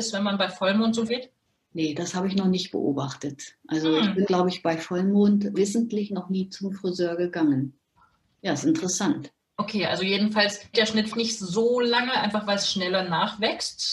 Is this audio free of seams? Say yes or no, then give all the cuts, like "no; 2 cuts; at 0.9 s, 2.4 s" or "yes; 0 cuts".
no; 5 cuts; at 1.1 s, 4.3 s, 5.5 s, 10.7 s, 11.1 s